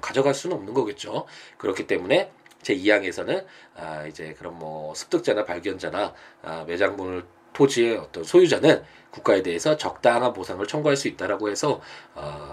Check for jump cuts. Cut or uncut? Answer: uncut